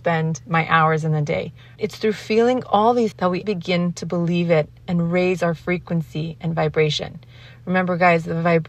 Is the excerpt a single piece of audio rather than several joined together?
no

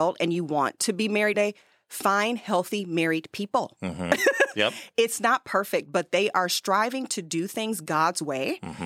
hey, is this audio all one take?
no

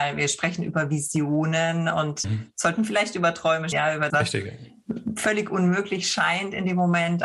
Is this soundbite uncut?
no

